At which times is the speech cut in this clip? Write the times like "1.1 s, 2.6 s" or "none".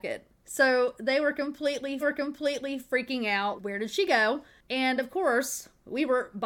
2.0 s, 3.6 s